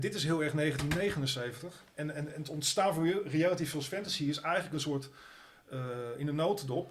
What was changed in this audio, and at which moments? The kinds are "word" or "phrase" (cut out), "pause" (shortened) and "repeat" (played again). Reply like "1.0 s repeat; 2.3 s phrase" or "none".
none